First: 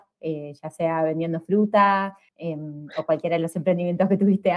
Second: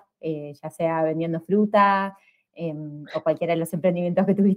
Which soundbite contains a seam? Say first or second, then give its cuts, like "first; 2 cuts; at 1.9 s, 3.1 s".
first; 1 cut; at 2.3 s